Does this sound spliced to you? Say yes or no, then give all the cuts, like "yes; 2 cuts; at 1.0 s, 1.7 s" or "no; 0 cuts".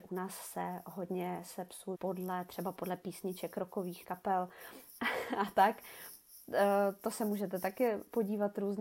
yes; 2 cuts; at 1.9 s, 4.0 s